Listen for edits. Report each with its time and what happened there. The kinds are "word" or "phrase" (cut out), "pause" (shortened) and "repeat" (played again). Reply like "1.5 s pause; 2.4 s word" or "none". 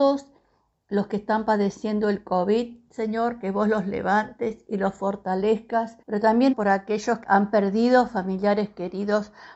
3.4 s word; 6.0 s pause; 6.5 s word; 7.2 s phrase